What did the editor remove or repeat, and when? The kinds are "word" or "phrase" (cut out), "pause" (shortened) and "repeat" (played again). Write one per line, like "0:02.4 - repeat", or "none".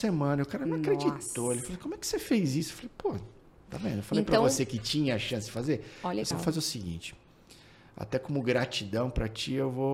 0:06.3 - word